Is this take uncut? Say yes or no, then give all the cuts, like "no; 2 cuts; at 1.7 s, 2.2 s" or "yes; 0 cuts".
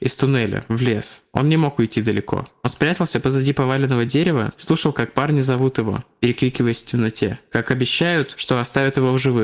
yes; 0 cuts